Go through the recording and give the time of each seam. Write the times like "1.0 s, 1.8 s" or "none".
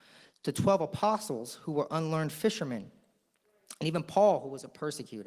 none